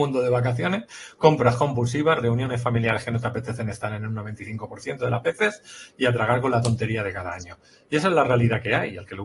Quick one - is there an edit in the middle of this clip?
no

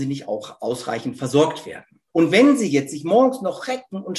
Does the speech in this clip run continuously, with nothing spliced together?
no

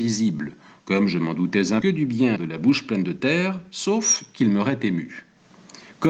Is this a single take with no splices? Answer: no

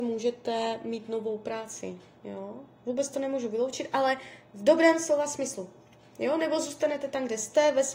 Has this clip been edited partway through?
no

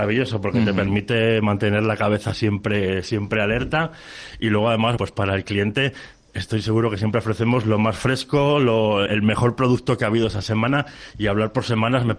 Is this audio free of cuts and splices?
no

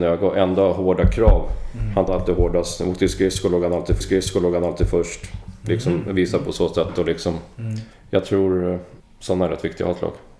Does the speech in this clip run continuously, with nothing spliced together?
no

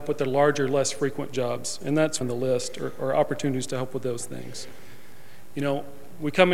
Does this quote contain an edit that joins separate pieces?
yes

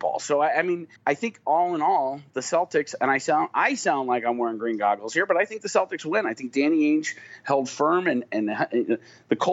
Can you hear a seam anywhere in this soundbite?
yes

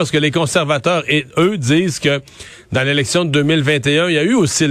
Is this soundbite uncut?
yes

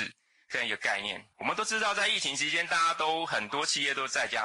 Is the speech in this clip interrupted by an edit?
yes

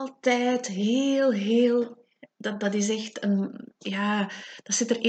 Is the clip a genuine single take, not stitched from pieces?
no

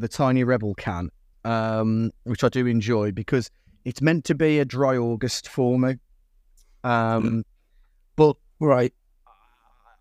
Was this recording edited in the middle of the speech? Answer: yes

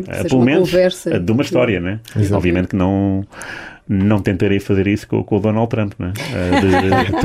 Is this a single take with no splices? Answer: yes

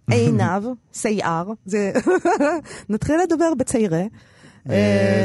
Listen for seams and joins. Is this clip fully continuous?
yes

